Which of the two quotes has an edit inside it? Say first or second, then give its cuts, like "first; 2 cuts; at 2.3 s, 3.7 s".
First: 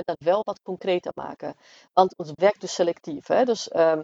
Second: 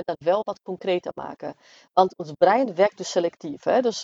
first; 1 cut; at 2.4 s